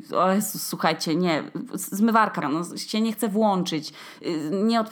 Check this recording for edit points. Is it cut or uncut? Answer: cut